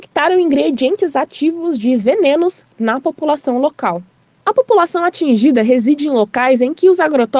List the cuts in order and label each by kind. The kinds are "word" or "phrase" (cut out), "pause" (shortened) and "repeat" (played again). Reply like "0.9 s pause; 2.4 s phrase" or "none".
none